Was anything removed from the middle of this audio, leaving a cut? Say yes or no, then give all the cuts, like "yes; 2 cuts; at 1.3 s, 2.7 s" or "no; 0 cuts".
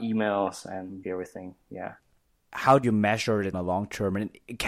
yes; 3 cuts; at 1.0 s, 2.8 s, 3.5 s